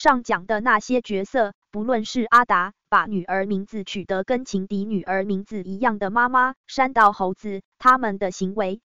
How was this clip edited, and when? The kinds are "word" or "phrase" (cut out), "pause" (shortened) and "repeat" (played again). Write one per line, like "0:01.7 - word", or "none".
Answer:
0:02.8 - word